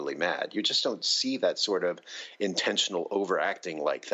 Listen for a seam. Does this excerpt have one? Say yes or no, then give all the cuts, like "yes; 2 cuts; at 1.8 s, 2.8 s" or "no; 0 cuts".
no; 0 cuts